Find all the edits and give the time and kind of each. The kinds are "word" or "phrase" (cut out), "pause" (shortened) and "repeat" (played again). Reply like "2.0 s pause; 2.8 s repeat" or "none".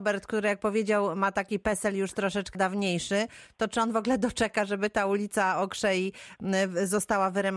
2.5 s word